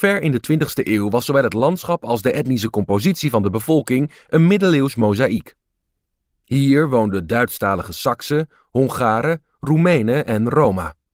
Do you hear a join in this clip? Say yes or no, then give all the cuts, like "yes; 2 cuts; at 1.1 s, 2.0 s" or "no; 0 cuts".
no; 0 cuts